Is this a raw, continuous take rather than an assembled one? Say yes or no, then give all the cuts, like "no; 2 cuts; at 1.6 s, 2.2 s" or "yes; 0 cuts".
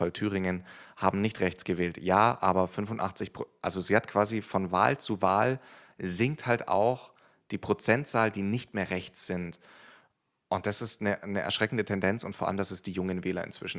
yes; 0 cuts